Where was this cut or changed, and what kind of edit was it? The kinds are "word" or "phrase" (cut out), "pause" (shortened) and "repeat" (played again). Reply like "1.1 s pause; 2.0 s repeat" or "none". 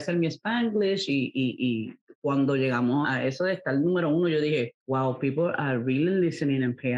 3.0 s word; 4.8 s pause